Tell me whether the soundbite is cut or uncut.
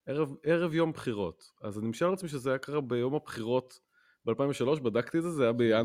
uncut